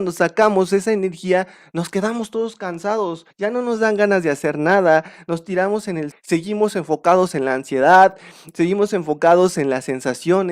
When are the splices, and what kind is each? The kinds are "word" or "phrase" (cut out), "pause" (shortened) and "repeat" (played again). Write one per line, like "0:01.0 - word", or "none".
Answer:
0:03.3 - pause
0:06.1 - word